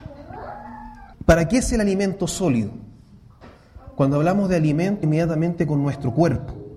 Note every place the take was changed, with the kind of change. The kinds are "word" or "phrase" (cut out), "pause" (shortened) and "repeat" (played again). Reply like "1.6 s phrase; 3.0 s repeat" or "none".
1.1 s pause; 5.0 s phrase